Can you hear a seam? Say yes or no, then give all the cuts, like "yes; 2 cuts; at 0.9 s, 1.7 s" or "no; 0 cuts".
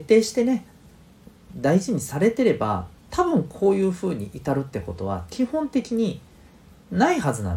yes; 2 cuts; at 1.5 s, 3.0 s